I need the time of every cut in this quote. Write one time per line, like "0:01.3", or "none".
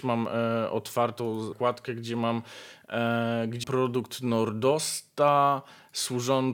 0:01.5
0:03.6